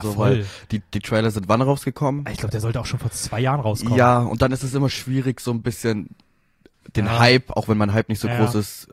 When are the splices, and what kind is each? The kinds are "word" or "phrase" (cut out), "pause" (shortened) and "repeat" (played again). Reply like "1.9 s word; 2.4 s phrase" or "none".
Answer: none